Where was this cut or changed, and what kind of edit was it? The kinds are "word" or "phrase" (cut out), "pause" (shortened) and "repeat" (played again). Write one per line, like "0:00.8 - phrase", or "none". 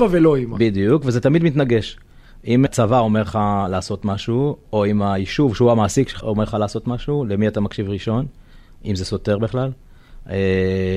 0:02.7 - word
0:06.2 - word